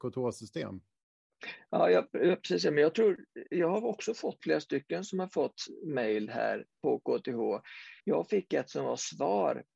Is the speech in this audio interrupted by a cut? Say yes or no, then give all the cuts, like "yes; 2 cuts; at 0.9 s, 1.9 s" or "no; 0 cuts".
yes; 2 cuts; at 4.4 s, 8.0 s